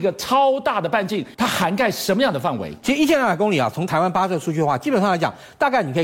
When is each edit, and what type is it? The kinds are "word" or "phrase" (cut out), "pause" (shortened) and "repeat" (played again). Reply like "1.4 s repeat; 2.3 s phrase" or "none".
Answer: 1.3 s pause